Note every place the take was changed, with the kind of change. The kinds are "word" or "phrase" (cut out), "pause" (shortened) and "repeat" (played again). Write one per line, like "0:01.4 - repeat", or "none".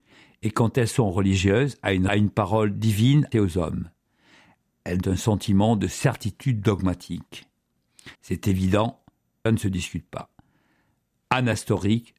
0:02.1 - phrase
0:03.3 - word
0:05.0 - word
0:08.1 - pause
0:09.5 - word